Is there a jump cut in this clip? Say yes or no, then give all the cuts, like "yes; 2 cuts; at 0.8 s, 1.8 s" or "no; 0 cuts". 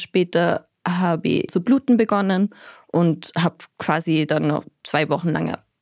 yes; 1 cut; at 1.5 s